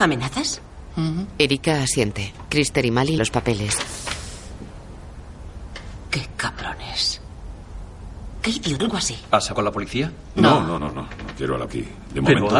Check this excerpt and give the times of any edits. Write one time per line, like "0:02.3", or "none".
0:03.2
0:08.8
0:09.5
0:10.8
0:11.7